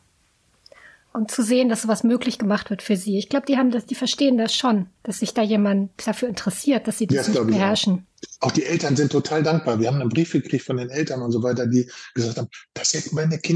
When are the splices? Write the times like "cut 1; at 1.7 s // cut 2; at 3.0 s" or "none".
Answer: cut 1; at 5.0 s // cut 2; at 6.0 s